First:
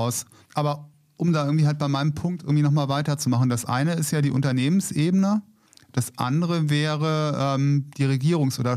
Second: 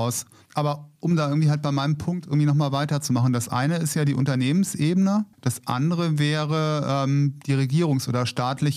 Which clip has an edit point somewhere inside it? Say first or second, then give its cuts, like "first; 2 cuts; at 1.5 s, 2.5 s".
second; 2 cuts; at 1.0 s, 5.3 s